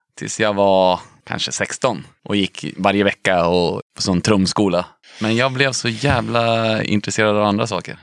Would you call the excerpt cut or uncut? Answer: uncut